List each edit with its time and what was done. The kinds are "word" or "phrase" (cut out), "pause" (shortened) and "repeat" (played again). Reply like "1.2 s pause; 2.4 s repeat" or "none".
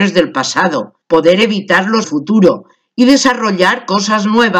1.0 s pause; 2.0 s phrase